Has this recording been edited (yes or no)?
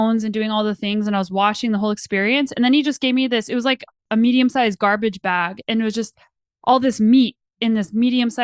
no